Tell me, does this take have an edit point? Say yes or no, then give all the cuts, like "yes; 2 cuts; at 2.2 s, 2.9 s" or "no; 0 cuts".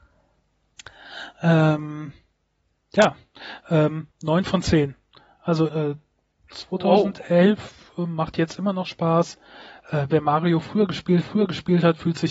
yes; 3 cuts; at 4.1 s, 5.7 s, 11.2 s